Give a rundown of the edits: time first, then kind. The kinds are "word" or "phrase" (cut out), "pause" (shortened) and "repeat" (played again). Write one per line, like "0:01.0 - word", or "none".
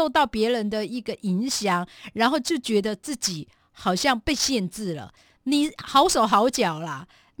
none